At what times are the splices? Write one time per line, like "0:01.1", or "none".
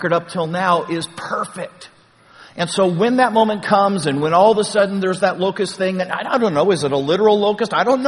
none